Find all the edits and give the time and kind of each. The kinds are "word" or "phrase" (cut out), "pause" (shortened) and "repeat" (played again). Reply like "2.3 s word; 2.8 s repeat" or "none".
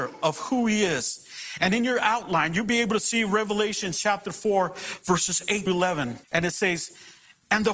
5.7 s word; 6.2 s pause